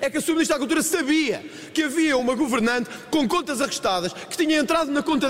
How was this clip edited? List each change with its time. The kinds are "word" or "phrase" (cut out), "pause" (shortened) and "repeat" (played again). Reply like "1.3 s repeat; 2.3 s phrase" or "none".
none

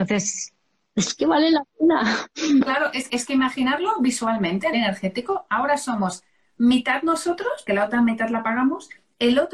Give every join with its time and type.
3.1 s word; 4.7 s word; 7.7 s word

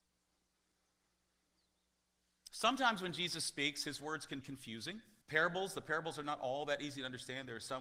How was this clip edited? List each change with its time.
4.4 s word; 5.2 s pause

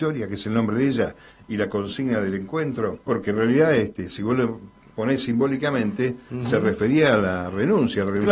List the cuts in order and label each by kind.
3.0 s pause

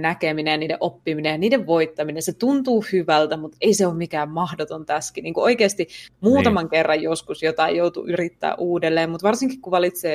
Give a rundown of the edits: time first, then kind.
none

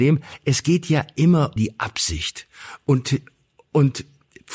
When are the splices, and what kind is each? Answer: 1.6 s word

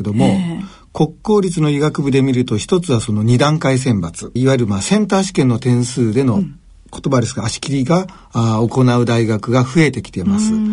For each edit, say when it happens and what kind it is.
4.4 s phrase; 8.2 s pause

